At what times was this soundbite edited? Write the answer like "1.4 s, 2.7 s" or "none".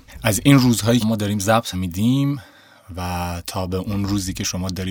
1.0 s, 1.7 s